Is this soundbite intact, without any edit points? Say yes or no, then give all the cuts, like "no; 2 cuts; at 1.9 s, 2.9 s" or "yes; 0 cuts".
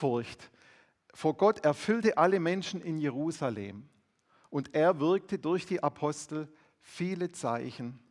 yes; 0 cuts